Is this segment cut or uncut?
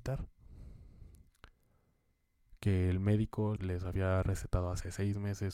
cut